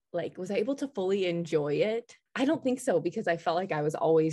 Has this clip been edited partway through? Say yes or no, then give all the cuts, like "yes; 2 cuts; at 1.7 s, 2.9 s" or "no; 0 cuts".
yes; 1 cut; at 2.3 s